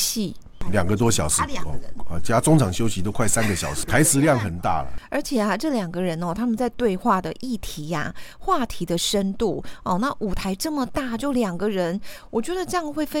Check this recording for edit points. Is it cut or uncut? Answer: uncut